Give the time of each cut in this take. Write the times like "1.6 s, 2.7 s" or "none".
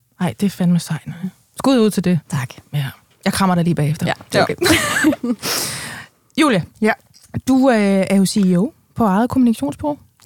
3.1 s, 6.7 s